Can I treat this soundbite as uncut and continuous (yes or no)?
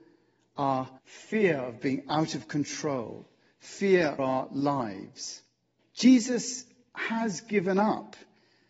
no